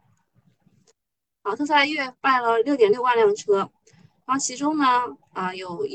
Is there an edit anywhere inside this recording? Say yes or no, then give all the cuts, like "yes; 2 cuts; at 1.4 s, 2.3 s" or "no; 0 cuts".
no; 0 cuts